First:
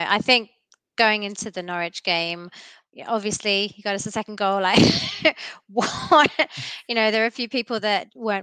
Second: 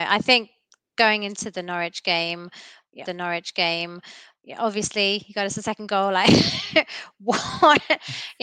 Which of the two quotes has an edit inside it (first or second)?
second